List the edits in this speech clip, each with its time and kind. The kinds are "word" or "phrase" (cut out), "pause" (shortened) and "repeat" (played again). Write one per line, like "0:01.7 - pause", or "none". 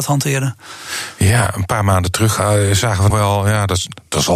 0:03.1 - word